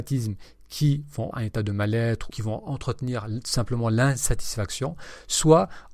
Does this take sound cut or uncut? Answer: cut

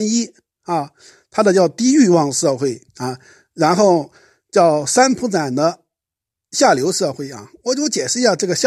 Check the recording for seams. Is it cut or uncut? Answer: cut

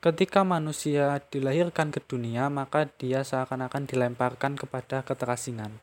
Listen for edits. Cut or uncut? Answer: uncut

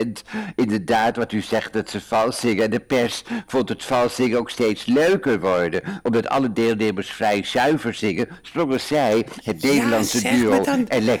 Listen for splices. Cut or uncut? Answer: uncut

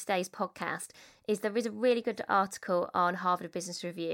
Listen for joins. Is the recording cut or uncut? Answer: uncut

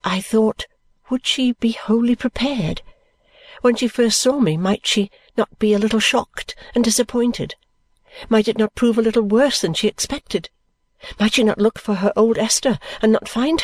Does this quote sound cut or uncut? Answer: uncut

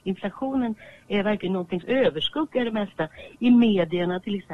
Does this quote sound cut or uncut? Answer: cut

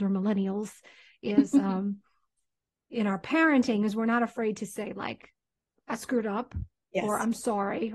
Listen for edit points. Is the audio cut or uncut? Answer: uncut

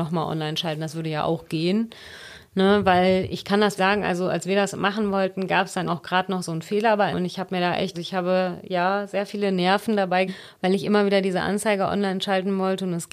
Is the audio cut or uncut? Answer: cut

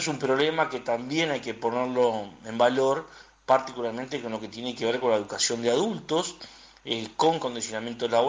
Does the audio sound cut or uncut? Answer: uncut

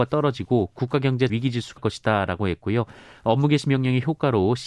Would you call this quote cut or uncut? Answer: cut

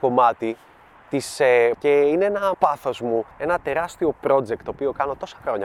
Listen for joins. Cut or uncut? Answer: cut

